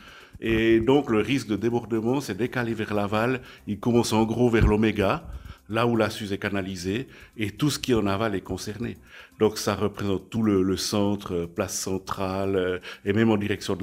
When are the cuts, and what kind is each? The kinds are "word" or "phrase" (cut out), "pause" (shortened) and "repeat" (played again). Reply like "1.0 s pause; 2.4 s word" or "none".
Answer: none